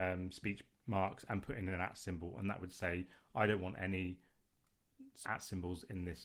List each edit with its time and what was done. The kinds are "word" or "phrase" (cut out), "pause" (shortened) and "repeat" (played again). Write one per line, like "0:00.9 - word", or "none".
0:05.2 - word